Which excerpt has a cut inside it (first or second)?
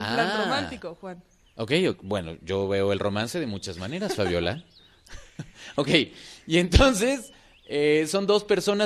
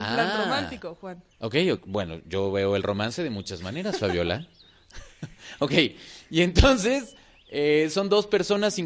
second